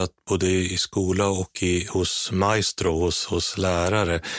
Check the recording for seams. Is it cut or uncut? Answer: uncut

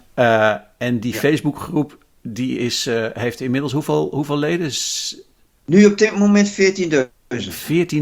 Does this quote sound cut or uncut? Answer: uncut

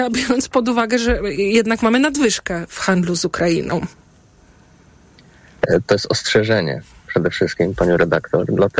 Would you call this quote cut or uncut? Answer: uncut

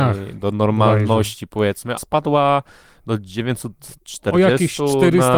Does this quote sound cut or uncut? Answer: cut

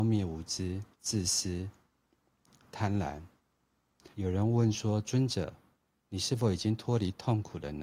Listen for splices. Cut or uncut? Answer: cut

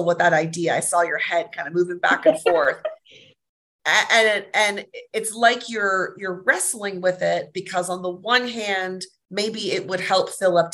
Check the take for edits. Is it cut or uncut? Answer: uncut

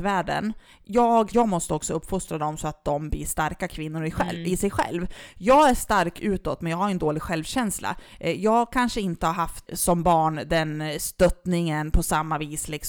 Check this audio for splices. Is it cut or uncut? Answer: cut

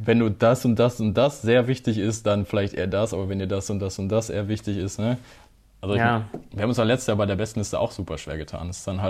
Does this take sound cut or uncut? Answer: uncut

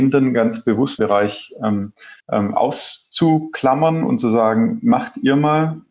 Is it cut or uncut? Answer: cut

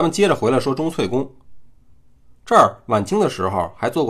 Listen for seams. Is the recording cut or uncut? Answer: uncut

